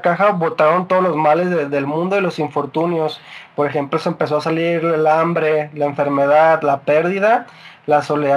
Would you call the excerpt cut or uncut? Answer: uncut